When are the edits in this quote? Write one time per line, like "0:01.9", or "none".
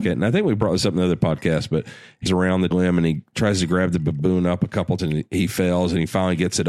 0:02.3
0:02.7
0:05.0